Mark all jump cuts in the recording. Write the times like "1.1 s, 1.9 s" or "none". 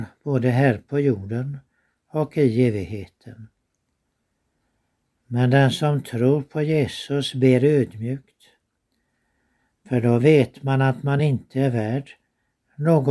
none